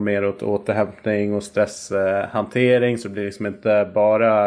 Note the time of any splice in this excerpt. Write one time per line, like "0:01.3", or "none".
none